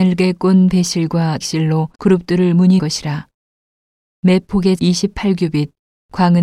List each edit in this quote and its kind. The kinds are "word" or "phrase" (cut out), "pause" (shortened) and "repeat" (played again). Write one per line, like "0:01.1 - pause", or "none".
0:01.4 - phrase
0:01.9 - pause
0:02.8 - phrase
0:04.8 - word